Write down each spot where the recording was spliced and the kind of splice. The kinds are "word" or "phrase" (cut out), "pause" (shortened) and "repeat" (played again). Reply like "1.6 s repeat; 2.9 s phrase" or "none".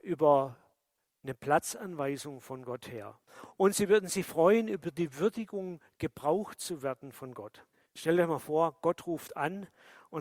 1.0 s pause; 7.7 s pause